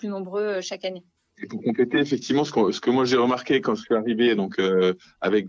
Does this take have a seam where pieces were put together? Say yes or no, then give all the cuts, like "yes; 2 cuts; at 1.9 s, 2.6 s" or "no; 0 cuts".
no; 0 cuts